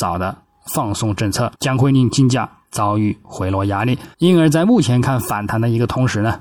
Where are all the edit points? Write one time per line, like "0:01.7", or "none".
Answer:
0:01.5
0:04.1